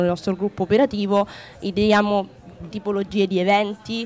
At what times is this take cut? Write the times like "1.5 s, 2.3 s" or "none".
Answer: 2.7 s